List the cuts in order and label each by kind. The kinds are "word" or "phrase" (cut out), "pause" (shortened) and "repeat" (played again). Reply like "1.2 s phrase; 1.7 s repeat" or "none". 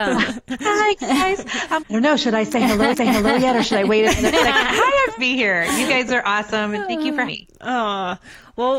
1.8 s word; 2.9 s repeat; 5.2 s phrase; 7.3 s word